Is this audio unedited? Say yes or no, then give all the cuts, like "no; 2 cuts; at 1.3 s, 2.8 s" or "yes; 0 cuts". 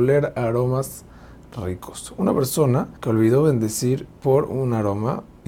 no; 2 cuts; at 3.0 s, 4.2 s